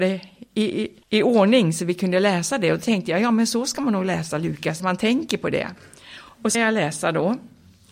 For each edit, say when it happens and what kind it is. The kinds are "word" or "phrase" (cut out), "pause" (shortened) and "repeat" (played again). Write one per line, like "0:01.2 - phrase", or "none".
0:01.0 - pause
0:04.8 - phrase
0:06.5 - word